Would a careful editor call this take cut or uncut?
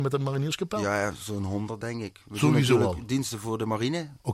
uncut